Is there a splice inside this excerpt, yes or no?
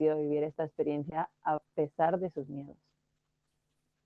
no